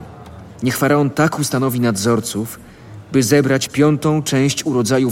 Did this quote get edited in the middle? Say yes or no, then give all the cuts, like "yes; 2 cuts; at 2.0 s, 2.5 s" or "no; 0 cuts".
no; 0 cuts